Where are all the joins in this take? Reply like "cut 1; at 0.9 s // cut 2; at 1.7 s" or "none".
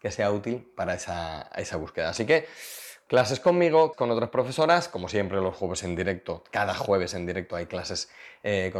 cut 1; at 3.9 s